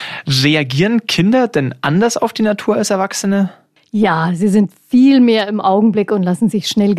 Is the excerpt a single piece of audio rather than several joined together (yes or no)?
yes